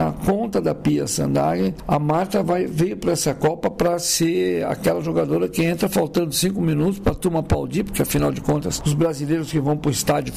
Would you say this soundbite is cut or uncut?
uncut